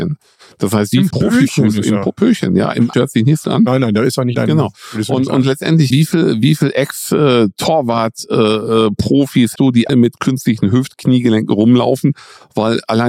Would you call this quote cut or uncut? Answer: cut